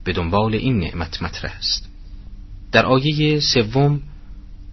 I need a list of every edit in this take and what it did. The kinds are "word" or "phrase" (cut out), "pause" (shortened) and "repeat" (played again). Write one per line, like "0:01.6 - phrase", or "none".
none